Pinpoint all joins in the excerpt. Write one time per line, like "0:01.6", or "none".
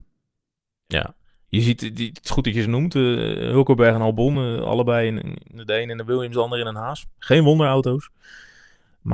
none